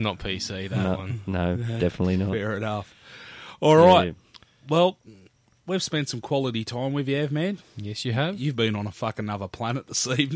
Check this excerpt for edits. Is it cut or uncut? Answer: uncut